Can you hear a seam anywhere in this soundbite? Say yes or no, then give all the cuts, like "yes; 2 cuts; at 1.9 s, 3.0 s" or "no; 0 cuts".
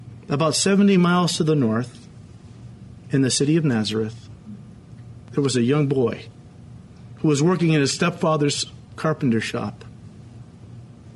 no; 0 cuts